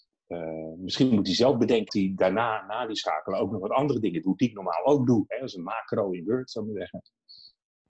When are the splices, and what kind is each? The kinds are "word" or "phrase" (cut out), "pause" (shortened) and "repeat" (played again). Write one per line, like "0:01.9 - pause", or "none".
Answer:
0:01.9 - word